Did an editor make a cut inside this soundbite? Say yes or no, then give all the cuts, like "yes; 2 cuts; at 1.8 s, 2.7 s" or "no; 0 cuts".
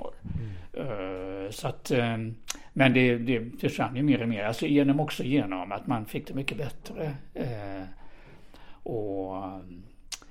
no; 0 cuts